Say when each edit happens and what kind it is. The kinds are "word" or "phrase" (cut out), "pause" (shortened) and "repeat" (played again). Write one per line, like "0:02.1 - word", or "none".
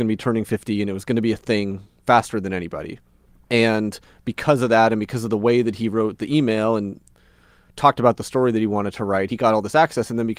none